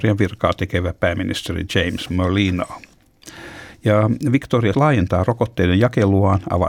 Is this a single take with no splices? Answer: no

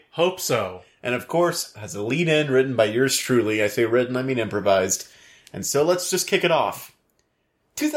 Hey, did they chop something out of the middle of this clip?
yes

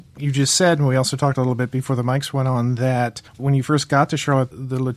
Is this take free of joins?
no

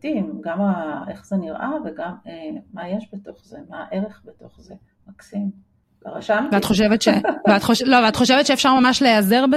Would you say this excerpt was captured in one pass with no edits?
yes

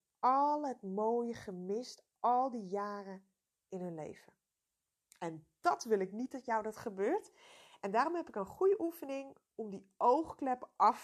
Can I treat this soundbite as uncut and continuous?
yes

